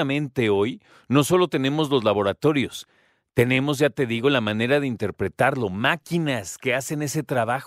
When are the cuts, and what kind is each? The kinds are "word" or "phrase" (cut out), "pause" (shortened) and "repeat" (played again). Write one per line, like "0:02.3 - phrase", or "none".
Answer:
none